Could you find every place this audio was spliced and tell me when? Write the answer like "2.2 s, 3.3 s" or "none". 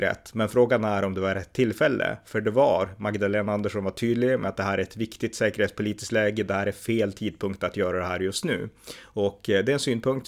none